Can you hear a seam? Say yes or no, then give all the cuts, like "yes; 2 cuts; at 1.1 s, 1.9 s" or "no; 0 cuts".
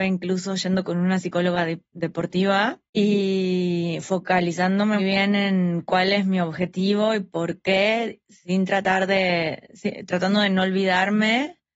yes; 2 cuts; at 2.9 s, 5.0 s